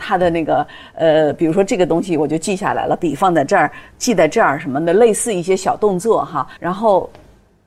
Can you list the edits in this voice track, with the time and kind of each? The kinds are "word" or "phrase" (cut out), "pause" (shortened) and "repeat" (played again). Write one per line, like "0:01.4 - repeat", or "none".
0:06.6 - pause